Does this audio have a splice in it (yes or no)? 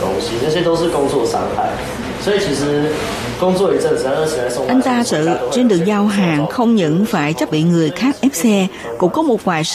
yes